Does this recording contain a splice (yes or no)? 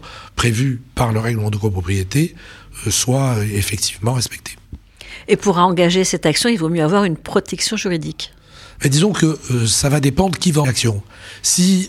yes